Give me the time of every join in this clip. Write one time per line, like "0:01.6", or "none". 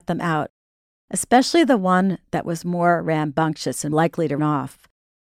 0:03.9
0:04.4